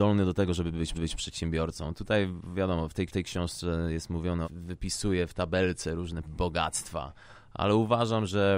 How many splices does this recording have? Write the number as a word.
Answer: four